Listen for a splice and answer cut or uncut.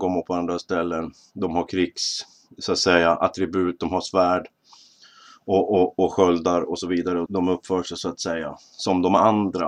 cut